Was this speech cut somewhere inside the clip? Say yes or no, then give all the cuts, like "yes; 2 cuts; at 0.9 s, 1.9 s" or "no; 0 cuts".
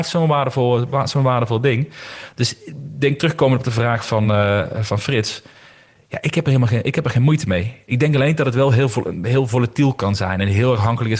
no; 0 cuts